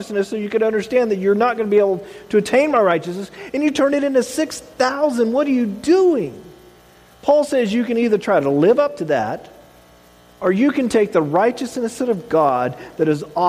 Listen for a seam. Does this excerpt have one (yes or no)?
no